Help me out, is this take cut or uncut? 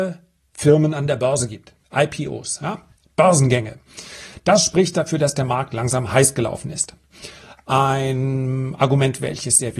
cut